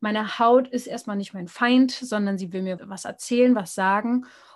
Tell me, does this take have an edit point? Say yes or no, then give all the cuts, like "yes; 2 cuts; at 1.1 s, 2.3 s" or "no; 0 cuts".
yes; 1 cut; at 2.8 s